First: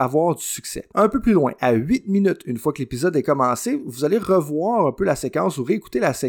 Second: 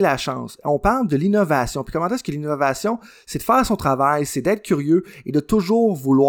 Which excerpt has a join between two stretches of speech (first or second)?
first